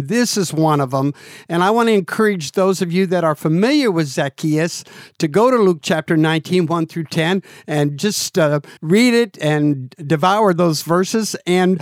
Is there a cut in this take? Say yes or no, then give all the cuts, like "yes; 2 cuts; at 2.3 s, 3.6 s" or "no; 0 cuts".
yes; 1 cut; at 8.8 s